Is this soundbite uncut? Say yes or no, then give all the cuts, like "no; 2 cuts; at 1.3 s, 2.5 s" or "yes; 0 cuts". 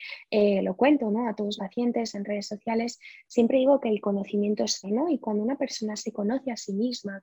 no; 2 cuts; at 1.6 s, 4.8 s